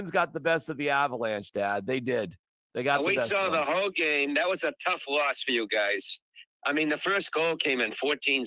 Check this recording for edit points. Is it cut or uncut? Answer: uncut